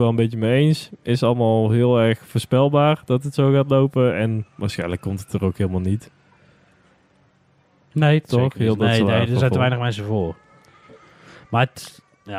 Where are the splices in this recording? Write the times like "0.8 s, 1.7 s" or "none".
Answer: none